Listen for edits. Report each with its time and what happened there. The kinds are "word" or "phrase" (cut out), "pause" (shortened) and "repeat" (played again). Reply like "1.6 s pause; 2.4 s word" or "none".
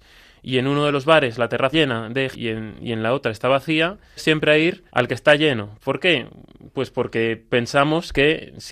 1.7 s word; 2.3 s word; 4.2 s phrase; 4.9 s pause